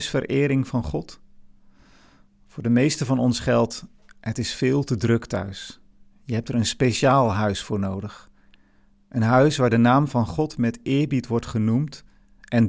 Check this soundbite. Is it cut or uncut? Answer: uncut